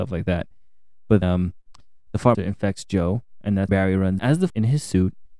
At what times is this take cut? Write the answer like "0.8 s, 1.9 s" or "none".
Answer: 1.2 s, 2.3 s, 3.7 s, 4.2 s, 4.5 s